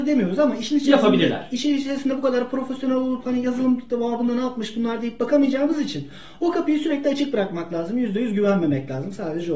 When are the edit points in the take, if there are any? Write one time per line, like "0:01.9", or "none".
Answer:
none